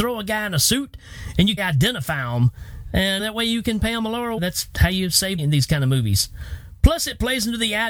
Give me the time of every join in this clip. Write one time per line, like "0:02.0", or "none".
0:01.6
0:03.2
0:04.4
0:05.4